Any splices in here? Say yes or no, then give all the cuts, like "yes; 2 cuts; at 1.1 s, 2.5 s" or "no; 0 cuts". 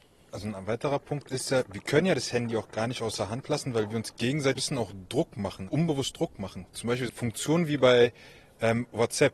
yes; 4 cuts; at 4.6 s, 5.7 s, 6.7 s, 7.1 s